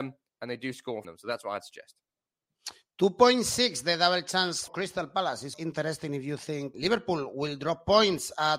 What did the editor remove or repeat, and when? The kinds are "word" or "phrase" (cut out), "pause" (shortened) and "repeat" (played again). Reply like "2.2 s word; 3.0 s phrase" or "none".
1.0 s word; 4.7 s word; 5.5 s word; 6.7 s word